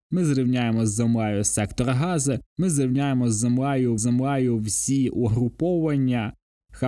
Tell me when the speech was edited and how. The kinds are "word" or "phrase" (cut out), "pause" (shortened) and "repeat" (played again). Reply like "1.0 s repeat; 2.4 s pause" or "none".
2.5 s pause; 4.0 s repeat